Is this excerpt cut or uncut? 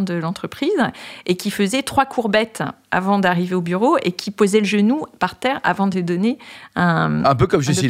uncut